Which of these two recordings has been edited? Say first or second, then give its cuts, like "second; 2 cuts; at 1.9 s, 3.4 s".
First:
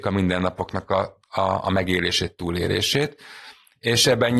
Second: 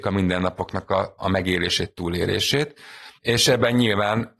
second; 2 cuts; at 1.2 s, 3.2 s